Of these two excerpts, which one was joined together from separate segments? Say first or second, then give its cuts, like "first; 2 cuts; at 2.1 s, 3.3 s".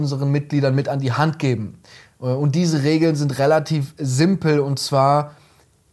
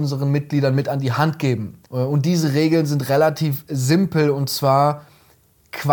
second; 1 cut; at 1.9 s